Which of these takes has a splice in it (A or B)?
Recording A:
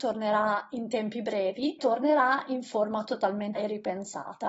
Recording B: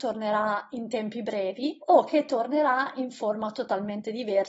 A